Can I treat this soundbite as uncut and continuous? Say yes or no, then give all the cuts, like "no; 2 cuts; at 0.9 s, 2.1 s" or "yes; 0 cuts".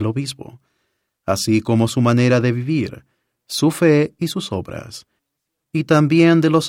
yes; 0 cuts